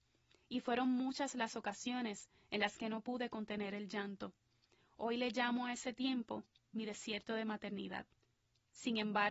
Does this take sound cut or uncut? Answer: uncut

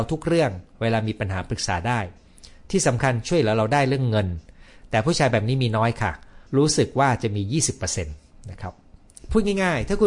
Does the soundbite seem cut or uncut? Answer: cut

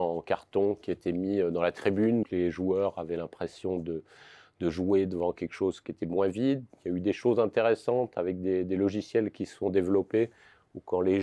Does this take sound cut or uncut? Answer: cut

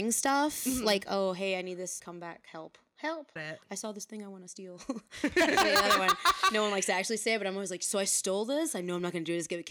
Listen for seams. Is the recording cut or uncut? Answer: cut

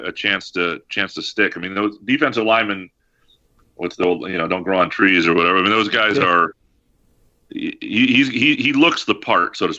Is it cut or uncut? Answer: uncut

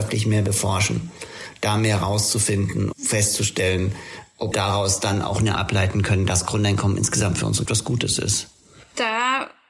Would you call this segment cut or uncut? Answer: cut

